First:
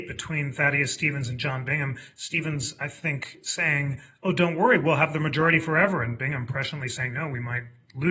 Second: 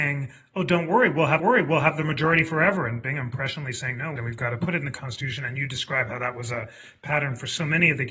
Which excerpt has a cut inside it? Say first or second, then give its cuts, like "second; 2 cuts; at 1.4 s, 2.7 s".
second; 2 cuts; at 1.4 s, 4.2 s